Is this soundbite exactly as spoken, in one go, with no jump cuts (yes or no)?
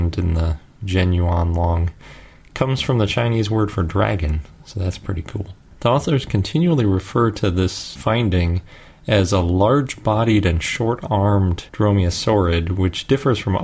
yes